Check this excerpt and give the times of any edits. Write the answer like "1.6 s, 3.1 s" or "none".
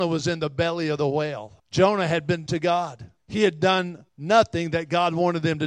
1.6 s, 2.5 s, 3.2 s, 4.1 s